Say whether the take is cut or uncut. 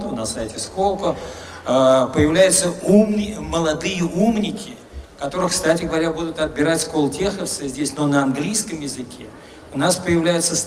uncut